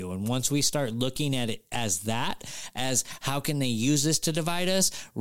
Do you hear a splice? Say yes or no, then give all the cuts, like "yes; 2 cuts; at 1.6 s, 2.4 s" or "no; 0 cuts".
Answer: no; 0 cuts